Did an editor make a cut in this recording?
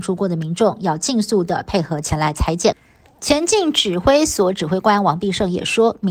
no; 0 cuts

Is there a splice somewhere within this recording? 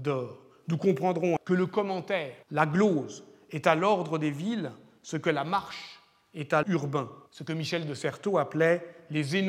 yes; 4 cuts; at 1.4 s, 2.4 s, 6.6 s, 7.3 s

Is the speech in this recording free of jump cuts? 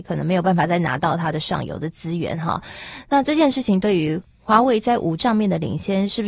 no; 1 cut; at 5.2 s

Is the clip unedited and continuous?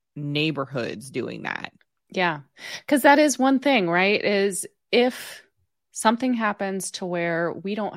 yes; 0 cuts

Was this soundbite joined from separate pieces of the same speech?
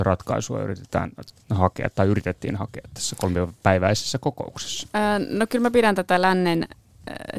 no; 0 cuts

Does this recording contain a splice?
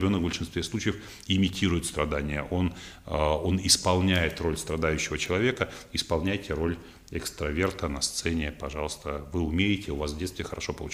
no; 0 cuts

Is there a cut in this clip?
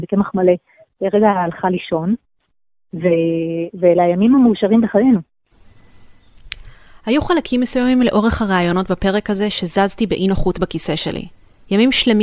no; 0 cuts

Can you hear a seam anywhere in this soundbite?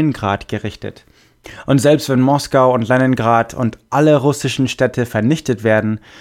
no; 0 cuts

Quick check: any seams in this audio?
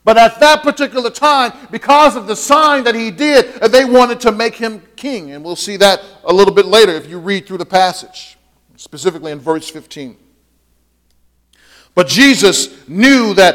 no; 0 cuts

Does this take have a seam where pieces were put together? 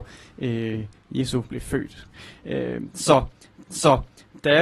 yes; 1 cut; at 3.7 s

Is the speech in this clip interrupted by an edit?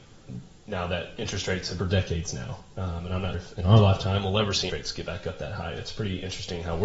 yes; 3 cuts; at 1.8 s, 3.3 s, 4.7 s

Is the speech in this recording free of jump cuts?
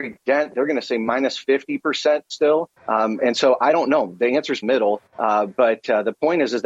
no; 3 cuts; at 2.8 s, 4.6 s, 5.1 s

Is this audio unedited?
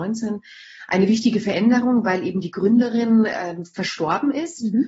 yes; 0 cuts

